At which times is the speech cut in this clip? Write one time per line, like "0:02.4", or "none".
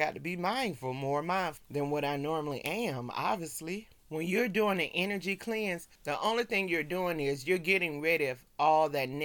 0:04.0
0:06.0